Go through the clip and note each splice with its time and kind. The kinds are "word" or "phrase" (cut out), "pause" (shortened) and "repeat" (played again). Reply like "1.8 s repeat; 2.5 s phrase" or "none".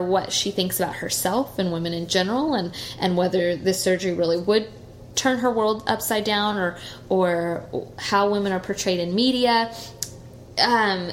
none